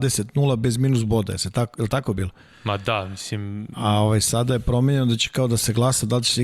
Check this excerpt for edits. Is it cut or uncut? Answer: uncut